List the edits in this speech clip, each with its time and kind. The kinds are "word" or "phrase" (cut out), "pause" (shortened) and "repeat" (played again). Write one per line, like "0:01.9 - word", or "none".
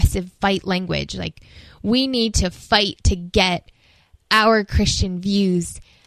none